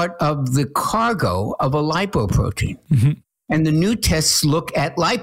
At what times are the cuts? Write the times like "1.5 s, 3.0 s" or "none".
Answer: none